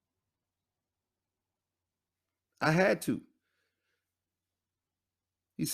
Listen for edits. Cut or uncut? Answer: uncut